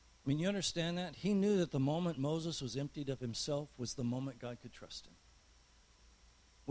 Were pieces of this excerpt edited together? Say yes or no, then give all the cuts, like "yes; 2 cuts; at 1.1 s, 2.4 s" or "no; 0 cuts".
no; 0 cuts